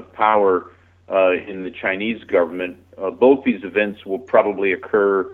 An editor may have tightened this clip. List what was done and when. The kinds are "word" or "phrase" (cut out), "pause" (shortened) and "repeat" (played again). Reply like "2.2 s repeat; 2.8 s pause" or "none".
none